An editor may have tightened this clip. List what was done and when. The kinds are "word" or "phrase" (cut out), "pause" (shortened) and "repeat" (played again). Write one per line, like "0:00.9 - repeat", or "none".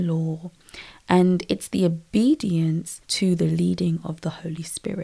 0:03.0 - pause